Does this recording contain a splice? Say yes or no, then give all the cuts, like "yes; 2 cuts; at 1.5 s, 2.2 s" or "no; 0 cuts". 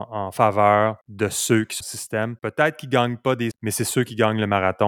yes; 4 cuts; at 1.0 s, 1.8 s, 2.4 s, 3.5 s